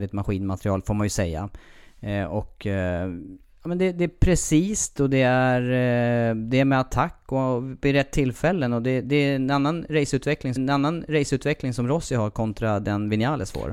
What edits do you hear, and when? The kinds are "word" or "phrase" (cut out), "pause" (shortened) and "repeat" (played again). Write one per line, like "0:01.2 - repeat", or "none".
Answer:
0:10.6 - repeat